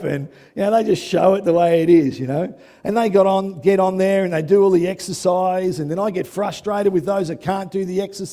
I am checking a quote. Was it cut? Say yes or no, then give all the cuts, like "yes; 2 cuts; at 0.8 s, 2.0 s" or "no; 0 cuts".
no; 0 cuts